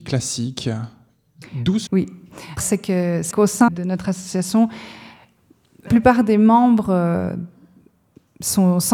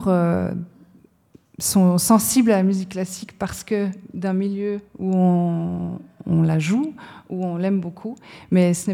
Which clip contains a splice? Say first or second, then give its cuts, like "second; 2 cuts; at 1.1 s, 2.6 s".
first; 5 cuts; at 1.9 s, 2.6 s, 3.3 s, 3.7 s, 5.9 s